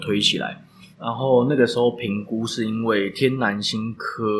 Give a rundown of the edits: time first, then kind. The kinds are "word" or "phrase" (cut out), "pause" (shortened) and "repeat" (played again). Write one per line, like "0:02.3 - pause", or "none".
0:00.9 - pause